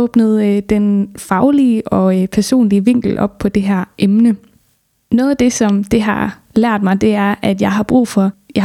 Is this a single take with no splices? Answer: yes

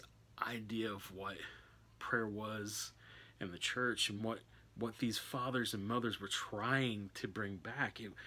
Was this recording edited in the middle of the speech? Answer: no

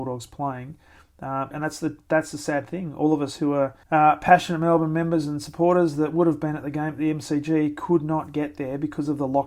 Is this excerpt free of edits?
no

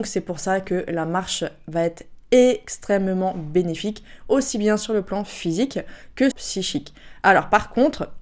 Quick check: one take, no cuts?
no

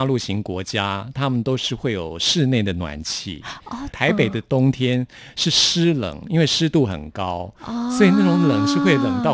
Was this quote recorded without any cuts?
yes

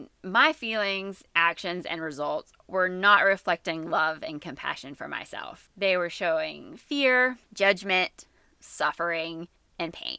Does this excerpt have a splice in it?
yes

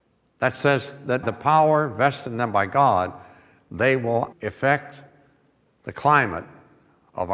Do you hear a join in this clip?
yes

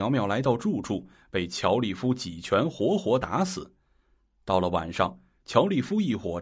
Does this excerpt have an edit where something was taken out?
no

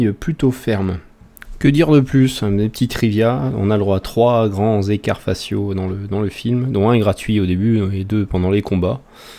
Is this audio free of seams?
yes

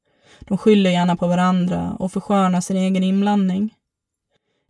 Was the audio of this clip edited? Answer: no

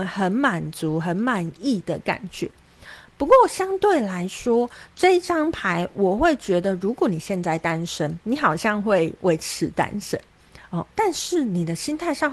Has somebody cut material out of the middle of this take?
yes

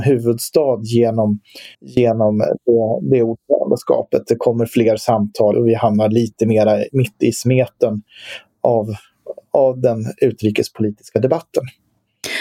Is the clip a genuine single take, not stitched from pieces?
no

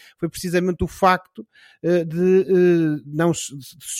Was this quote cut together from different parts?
no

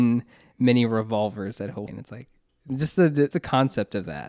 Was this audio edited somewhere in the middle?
yes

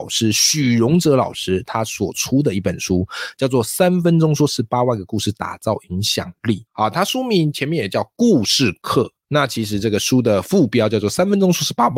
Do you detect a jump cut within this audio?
yes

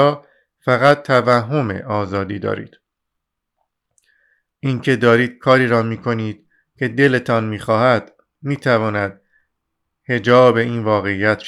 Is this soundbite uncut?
yes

